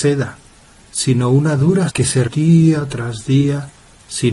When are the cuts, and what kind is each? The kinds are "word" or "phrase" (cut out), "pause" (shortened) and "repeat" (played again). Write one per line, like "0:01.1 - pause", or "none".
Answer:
0:01.9 - word
0:02.3 - word